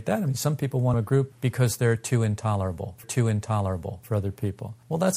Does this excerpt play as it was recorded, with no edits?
no; 2 cuts; at 0.9 s, 3.0 s

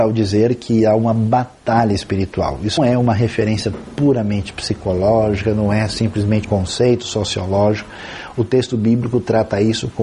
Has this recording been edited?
yes; 2 cuts; at 2.8 s, 6.4 s

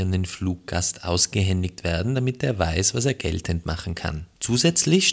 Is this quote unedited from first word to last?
yes; 0 cuts

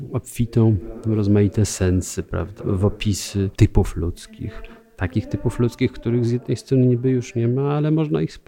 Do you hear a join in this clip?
yes; 2 cuts; at 2.6 s, 3.5 s

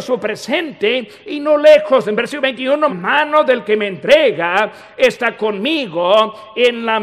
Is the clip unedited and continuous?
no; 1 cut; at 2.9 s

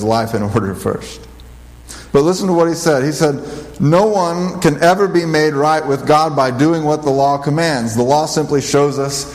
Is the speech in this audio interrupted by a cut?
no; 0 cuts

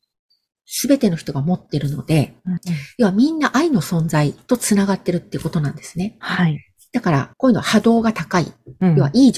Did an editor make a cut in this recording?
yes; 2 cuts; at 2.6 s, 7.3 s

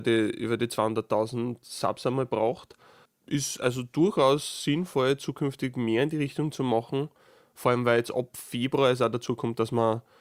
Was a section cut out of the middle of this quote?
no; 0 cuts

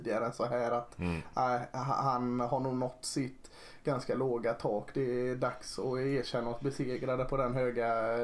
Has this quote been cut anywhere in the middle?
no; 0 cuts

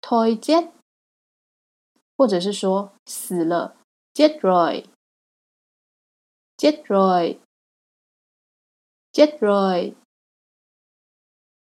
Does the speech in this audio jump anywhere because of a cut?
no; 0 cuts

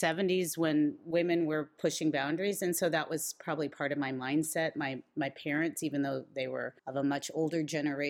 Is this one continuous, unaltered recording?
no; 1 cut; at 6.8 s

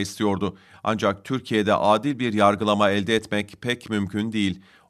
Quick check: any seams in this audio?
no; 0 cuts

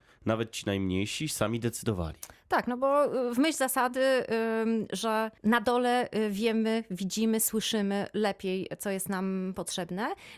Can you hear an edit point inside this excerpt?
yes; 1 cut; at 5.4 s

